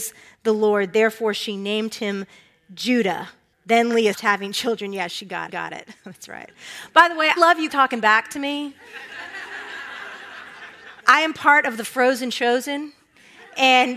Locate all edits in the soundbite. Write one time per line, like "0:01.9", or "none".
0:03.5
0:04.1
0:05.5
0:07.4
0:07.7
0:11.0